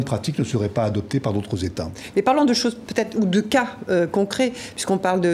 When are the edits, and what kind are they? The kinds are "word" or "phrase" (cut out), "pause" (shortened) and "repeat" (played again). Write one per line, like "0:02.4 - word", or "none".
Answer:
none